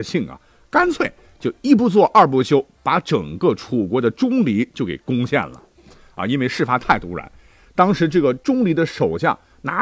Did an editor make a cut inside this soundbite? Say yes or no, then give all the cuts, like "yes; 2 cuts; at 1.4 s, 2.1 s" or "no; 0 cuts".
no; 0 cuts